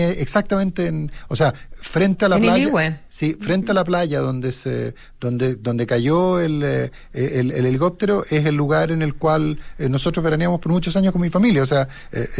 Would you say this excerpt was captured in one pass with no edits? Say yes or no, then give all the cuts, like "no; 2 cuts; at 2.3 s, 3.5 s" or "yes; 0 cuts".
yes; 0 cuts